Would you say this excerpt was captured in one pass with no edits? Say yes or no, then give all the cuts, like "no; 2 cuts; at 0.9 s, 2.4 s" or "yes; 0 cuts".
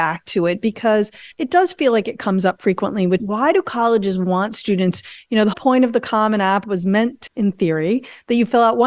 no; 4 cuts; at 1.3 s, 3.2 s, 5.5 s, 7.3 s